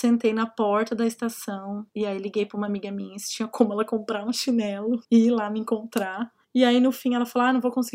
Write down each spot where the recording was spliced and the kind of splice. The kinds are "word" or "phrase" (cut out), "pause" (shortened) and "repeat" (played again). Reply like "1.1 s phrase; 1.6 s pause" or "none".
1.9 s pause; 5.0 s pause

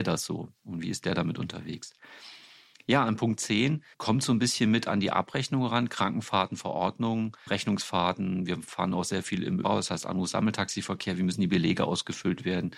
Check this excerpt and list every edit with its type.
3.9 s pause; 7.5 s word; 9.6 s word

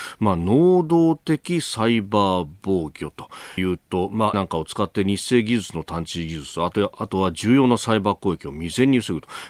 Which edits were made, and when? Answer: 3.6 s phrase; 4.3 s word

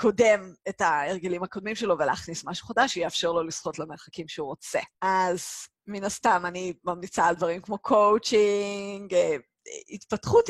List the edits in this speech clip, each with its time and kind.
4.9 s pause

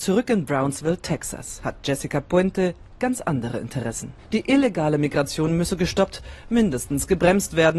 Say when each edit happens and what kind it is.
4.2 s pause

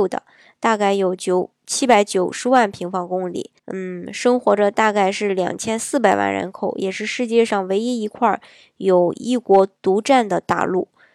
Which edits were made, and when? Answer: 3.6 s pause

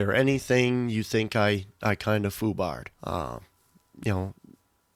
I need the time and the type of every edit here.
2.9 s pause

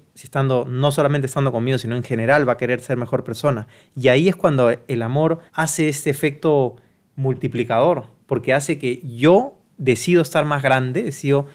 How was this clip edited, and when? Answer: 5.5 s pause; 8.2 s pause

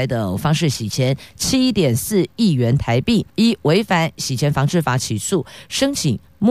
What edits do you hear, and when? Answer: 3.3 s pause

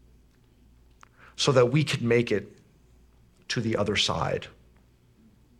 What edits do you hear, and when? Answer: none

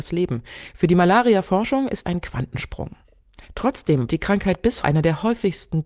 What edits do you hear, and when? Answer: 2.0 s word; 4.1 s word; 4.8 s word

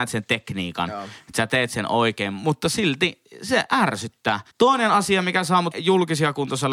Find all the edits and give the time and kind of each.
4.5 s pause; 5.7 s word

